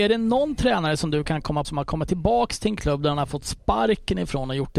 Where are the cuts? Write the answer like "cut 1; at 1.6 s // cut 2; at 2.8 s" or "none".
cut 1; at 1.6 s